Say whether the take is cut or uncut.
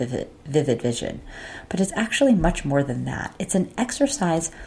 uncut